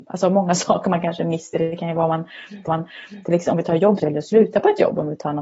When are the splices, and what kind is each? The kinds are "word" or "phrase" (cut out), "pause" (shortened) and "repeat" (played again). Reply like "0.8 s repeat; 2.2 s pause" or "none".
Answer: 2.7 s repeat; 4.0 s phrase

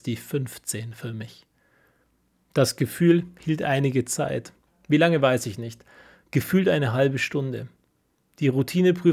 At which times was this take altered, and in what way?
none

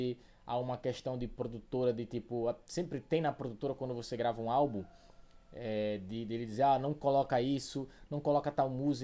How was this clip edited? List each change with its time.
none

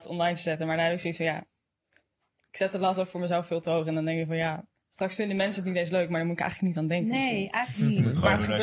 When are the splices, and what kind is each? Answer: 4.8 s pause

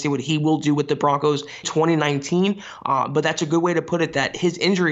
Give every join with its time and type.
1.6 s word

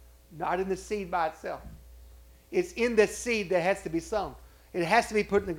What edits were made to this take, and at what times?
none

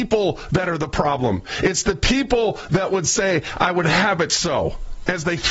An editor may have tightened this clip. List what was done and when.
none

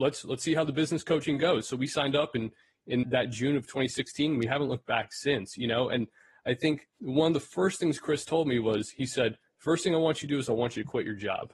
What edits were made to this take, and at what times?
3.0 s word

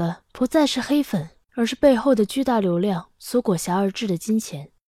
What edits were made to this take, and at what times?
1.4 s pause

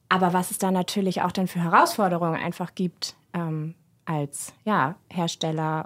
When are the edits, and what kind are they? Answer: none

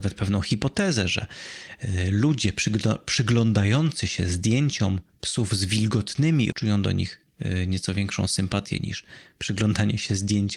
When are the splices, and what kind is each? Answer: 6.5 s word

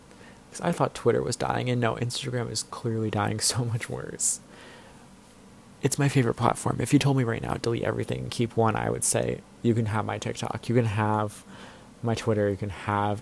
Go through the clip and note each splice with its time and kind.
none

